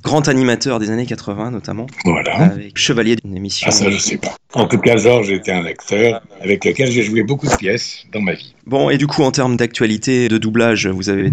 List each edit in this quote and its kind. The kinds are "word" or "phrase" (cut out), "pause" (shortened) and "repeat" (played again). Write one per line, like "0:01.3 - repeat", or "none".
0:02.8 - word
0:03.2 - word
0:09.0 - word
0:10.3 - word